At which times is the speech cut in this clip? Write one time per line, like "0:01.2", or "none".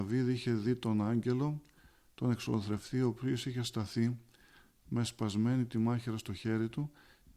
none